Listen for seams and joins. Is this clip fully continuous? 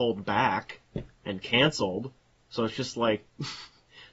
yes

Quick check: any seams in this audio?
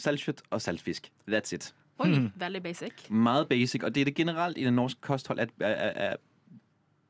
no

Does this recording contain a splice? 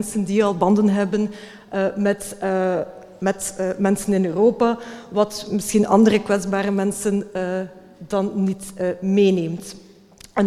no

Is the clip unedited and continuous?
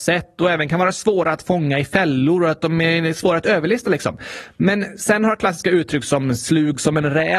yes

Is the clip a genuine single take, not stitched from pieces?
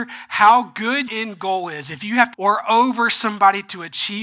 no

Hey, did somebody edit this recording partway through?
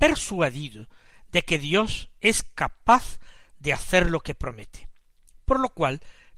no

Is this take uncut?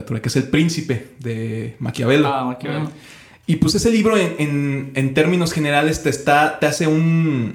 yes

